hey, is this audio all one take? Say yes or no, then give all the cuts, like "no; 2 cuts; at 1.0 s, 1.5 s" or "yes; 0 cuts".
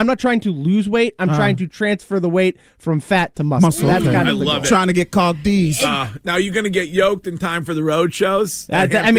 yes; 0 cuts